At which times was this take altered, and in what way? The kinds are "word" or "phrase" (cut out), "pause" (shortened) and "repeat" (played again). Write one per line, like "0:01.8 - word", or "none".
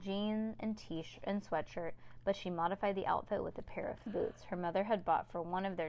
0:04.1 - word